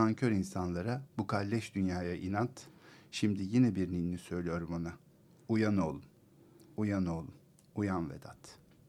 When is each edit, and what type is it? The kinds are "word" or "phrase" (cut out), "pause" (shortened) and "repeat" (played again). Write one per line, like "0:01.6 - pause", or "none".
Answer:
none